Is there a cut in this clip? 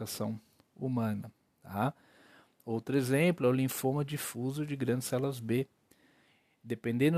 no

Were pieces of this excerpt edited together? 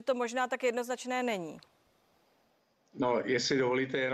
no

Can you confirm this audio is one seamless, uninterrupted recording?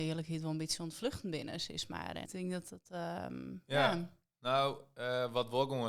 no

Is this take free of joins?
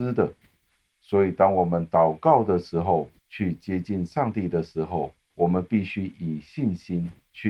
no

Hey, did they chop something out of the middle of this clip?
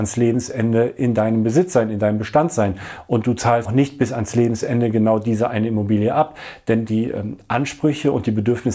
yes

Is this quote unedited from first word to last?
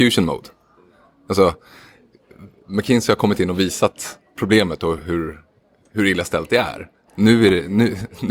yes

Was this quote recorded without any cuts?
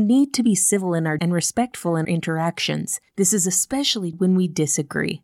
no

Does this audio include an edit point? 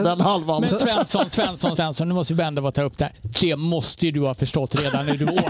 yes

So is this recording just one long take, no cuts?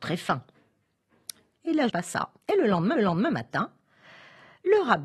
no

